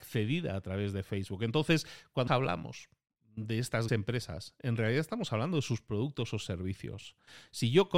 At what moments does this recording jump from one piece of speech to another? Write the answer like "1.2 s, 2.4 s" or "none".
2.3 s, 3.9 s